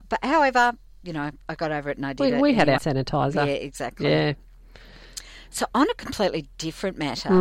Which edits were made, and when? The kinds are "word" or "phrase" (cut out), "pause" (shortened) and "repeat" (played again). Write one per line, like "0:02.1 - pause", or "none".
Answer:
0:02.8 - word